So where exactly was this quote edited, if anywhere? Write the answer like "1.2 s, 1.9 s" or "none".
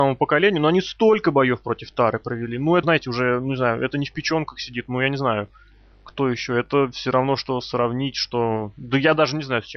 2.8 s

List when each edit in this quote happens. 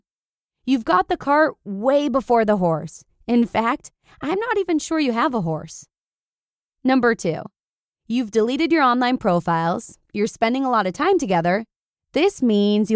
none

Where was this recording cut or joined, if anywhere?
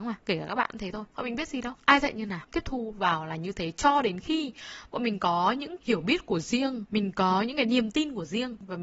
5.8 s

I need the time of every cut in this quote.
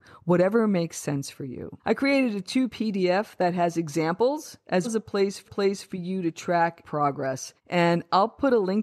1.8 s, 2.7 s, 4.8 s, 5.5 s, 6.8 s, 7.6 s

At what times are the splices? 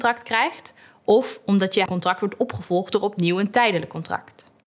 1.9 s

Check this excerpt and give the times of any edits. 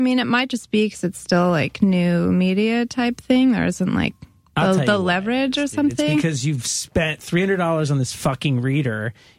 none

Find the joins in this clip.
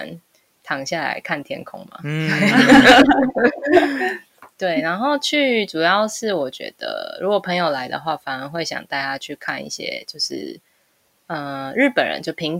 none

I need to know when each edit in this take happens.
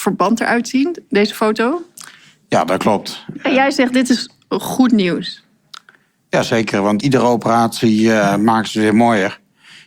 7.0 s

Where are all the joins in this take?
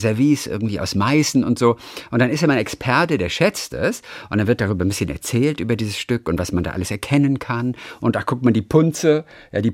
none

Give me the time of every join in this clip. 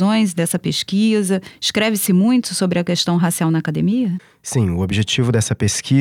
none

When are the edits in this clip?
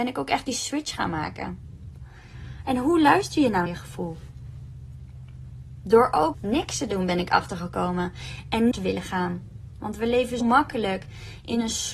3.7 s, 6.3 s, 8.7 s, 10.4 s

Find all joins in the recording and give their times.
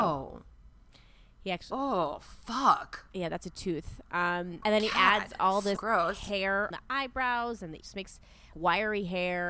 4.6 s, 5.8 s, 6.7 s, 7.8 s, 8.5 s

